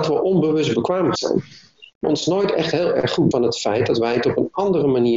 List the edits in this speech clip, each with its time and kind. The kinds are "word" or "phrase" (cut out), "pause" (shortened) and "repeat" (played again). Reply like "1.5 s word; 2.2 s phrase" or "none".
1.2 s word; 2.0 s word; 3.3 s word